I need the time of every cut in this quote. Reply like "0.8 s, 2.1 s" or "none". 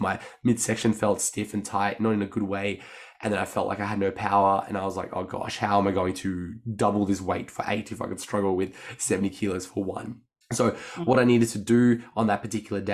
10.4 s